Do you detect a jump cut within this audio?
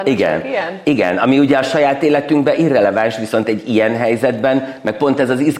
no; 0 cuts

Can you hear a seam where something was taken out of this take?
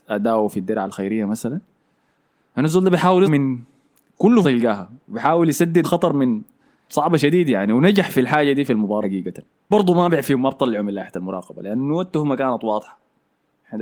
yes; 6 cuts; at 3.2 s, 4.4 s, 5.8 s, 6.9 s, 9.0 s, 9.7 s

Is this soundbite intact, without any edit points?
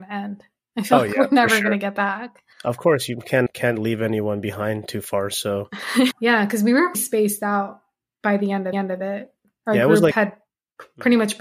no; 5 cuts; at 2.5 s, 3.5 s, 6.1 s, 6.9 s, 8.7 s

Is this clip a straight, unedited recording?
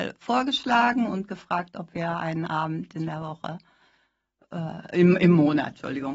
yes; 0 cuts

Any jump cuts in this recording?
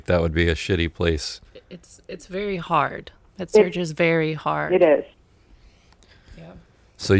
no; 0 cuts

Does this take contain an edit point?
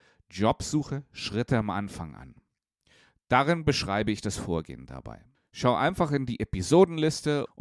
no; 0 cuts

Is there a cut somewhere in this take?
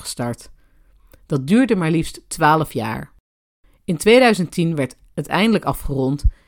no; 0 cuts

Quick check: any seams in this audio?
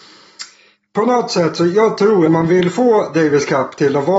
yes; 1 cut; at 2.3 s

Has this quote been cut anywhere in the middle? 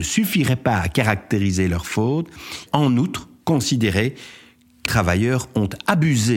yes; 2 cuts; at 2.7 s, 4.9 s

